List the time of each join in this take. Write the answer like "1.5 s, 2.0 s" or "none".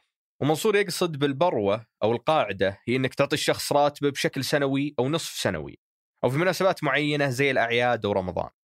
none